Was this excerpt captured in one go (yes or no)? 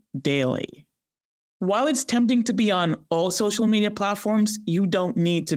yes